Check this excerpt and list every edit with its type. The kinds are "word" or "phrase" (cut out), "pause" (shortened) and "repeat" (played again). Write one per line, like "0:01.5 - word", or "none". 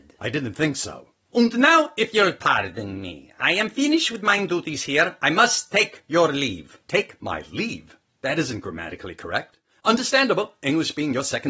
none